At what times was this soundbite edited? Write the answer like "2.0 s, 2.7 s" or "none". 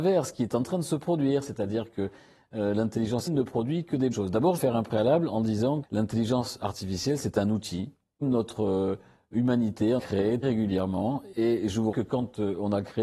3.3 s, 4.1 s, 4.6 s, 5.8 s, 8.2 s, 10.0 s, 10.4 s, 11.9 s